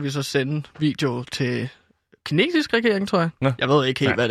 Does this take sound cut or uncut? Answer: uncut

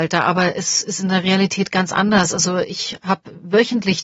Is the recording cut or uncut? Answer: uncut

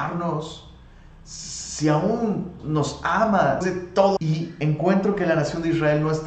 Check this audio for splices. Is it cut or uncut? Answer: cut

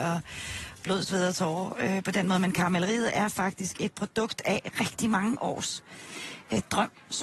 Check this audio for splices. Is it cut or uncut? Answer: uncut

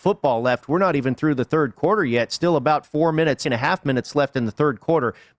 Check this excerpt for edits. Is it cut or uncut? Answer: cut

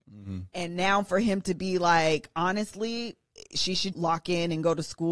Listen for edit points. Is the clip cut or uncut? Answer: cut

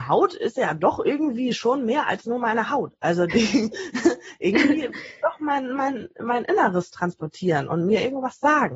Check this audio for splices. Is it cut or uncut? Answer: uncut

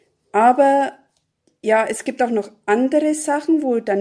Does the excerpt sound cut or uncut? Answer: uncut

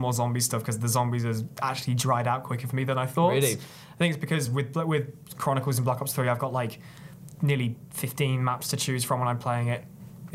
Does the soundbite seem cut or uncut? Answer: uncut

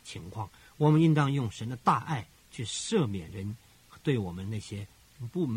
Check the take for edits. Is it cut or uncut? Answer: uncut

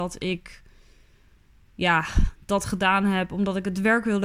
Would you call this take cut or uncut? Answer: uncut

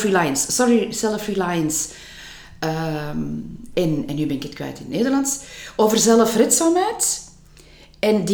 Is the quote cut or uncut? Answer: uncut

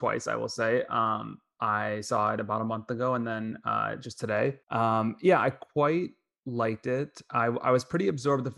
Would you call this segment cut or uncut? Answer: cut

